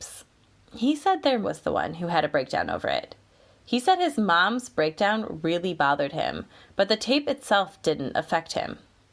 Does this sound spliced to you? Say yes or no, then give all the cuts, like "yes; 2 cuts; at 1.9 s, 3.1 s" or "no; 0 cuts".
yes; 1 cut; at 1.4 s